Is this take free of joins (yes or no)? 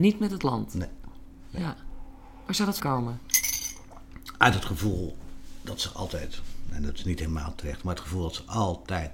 no